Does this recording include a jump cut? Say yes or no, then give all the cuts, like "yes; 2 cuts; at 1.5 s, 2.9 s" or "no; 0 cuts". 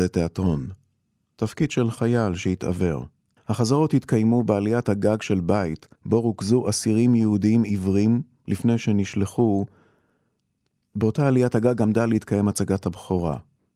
yes; 2 cuts; at 3.4 s, 6.0 s